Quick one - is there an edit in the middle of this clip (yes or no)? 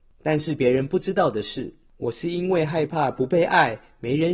no